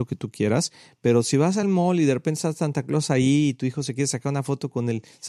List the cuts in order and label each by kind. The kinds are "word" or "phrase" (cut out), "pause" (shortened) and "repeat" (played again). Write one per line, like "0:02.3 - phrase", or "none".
none

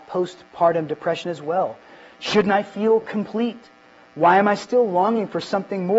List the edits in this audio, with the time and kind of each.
none

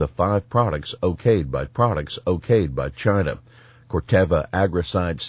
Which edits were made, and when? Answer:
0:01.7 - repeat

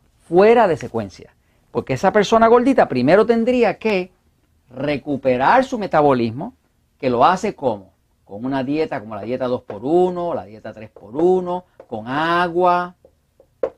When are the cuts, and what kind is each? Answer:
none

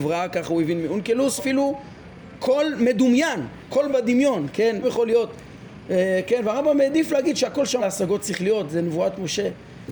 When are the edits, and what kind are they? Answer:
0:01.4 - word
0:04.8 - word
0:07.8 - word

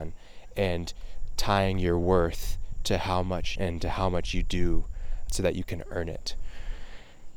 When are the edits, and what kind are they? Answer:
0:03.6 - phrase
0:05.3 - word

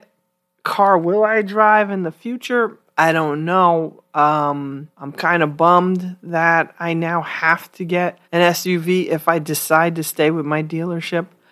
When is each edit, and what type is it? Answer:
0:04.9 - pause
0:08.2 - pause

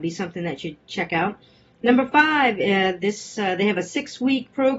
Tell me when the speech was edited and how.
none

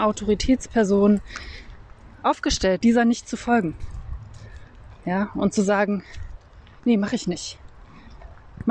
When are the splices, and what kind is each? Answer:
0:02.8 - word

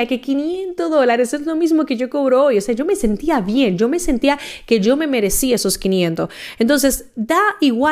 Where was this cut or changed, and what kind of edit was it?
none

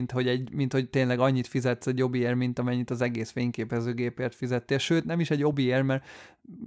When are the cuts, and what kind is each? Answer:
none

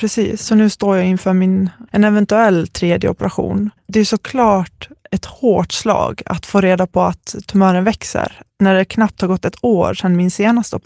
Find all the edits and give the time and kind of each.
0:01.9 - pause
0:03.8 - pause
0:08.5 - pause

